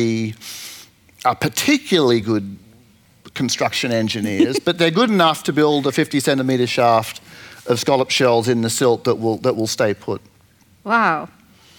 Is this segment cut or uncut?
uncut